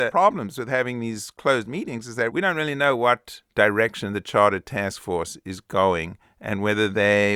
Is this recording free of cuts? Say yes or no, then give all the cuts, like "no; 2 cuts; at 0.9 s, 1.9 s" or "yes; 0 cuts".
yes; 0 cuts